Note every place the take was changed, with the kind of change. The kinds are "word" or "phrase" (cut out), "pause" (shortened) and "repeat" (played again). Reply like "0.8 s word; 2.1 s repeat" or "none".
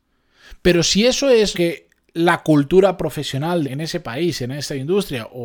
1.5 s word; 3.6 s word